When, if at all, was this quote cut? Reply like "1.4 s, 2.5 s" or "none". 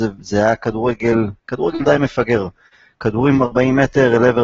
1.4 s, 3.4 s